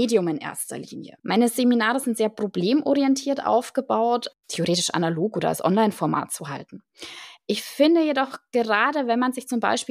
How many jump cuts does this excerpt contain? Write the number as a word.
one